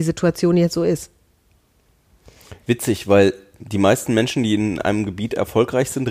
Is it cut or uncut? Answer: uncut